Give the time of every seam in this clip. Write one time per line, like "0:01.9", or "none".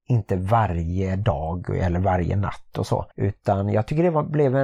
0:03.1